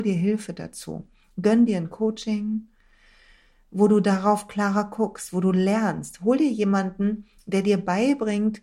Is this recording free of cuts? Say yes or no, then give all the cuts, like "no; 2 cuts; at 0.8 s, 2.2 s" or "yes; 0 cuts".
yes; 0 cuts